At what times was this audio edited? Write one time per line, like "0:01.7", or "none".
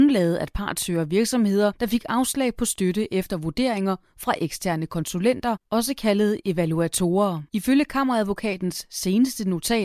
0:05.7
0:07.5

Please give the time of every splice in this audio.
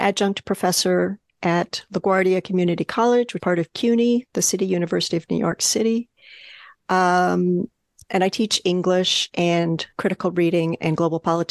0:03.4
0:09.9

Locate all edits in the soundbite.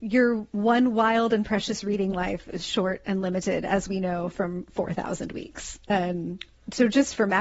none

